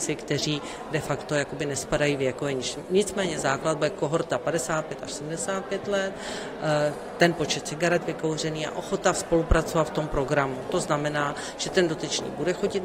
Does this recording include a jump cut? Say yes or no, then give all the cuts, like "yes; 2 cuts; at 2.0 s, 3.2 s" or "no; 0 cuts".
no; 0 cuts